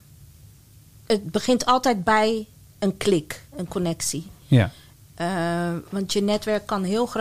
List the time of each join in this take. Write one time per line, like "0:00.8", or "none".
0:01.1
0:03.5